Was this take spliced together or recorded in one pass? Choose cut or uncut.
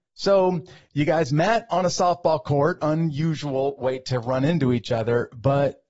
cut